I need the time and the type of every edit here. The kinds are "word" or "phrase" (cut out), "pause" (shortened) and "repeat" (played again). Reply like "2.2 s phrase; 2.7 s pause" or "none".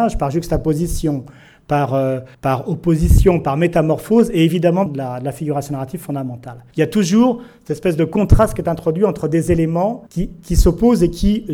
2.3 s pause; 4.9 s phrase; 6.7 s pause; 10.1 s pause